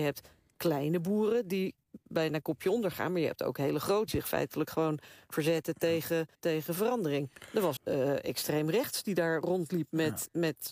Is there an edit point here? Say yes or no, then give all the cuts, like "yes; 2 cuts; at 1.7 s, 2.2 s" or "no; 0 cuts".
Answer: yes; 3 cuts; at 4.1 s, 6.3 s, 7.8 s